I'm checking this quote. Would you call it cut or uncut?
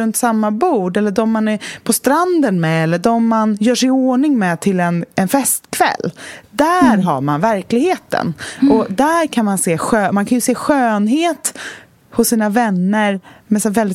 uncut